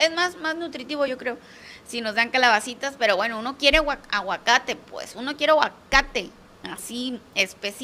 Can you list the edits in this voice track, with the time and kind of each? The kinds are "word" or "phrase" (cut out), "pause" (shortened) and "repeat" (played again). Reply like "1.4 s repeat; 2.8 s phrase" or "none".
none